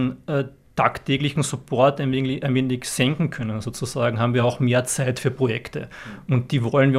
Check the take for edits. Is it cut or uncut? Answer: uncut